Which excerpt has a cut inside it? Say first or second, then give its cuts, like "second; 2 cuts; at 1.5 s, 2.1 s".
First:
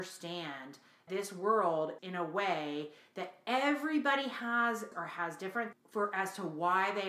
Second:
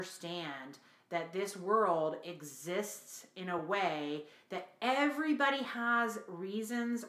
first; 4 cuts; at 1.1 s, 2.0 s, 4.9 s, 5.7 s